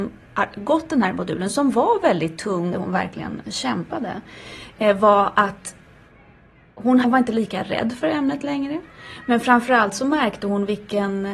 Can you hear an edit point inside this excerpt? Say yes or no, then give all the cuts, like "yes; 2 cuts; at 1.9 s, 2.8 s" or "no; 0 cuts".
yes; 2 cuts; at 2.7 s, 7.0 s